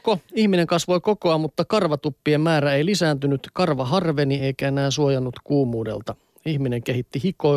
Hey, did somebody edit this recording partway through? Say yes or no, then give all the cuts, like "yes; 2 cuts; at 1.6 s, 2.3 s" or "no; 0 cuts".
no; 0 cuts